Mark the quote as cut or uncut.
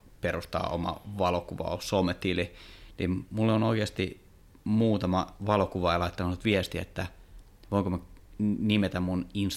uncut